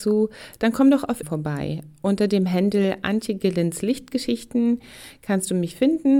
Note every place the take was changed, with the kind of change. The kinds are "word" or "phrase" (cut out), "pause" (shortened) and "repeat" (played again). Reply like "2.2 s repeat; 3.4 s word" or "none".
1.2 s word